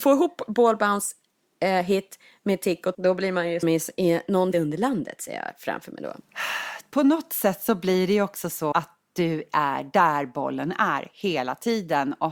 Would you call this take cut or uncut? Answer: cut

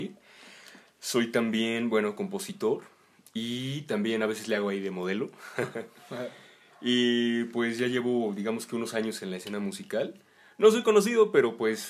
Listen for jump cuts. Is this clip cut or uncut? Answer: uncut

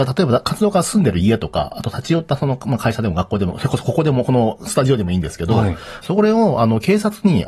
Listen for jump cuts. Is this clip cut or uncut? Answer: cut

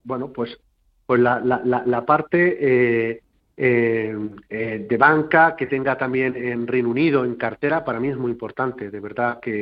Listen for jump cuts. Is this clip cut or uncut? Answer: cut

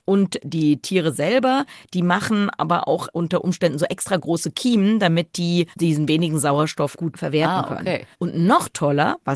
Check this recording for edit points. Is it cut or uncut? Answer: cut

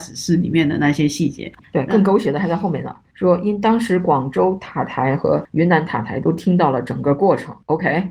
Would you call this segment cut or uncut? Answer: uncut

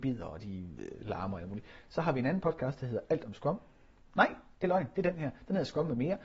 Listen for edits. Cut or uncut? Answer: uncut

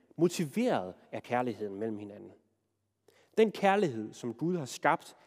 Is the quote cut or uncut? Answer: uncut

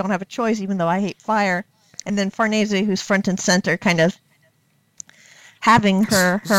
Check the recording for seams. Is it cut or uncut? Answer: uncut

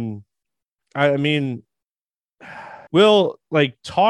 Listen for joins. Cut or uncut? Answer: cut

